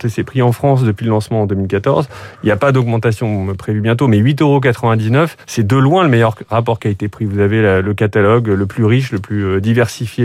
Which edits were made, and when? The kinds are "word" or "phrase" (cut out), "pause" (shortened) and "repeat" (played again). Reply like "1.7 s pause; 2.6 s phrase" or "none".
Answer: 5.4 s pause

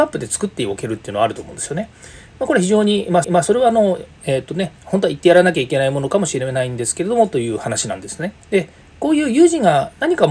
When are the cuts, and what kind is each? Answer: 3.2 s repeat; 4.8 s pause; 8.4 s pause

